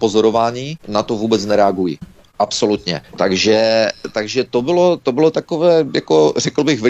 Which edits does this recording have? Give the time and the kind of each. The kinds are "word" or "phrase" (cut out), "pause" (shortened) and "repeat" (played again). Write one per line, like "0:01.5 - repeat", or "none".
0:03.0 - pause